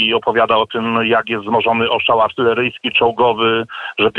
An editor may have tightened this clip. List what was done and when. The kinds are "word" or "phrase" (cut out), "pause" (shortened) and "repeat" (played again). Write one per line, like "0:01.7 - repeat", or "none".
none